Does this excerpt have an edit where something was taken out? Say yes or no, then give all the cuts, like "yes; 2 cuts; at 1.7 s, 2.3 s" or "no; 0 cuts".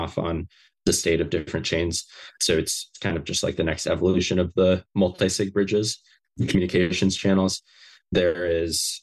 no; 0 cuts